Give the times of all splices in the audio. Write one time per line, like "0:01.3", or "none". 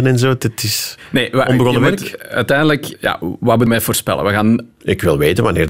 0:02.9
0:03.7